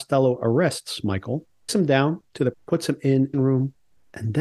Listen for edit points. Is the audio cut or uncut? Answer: cut